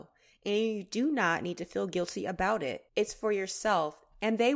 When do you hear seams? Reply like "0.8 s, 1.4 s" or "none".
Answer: 2.9 s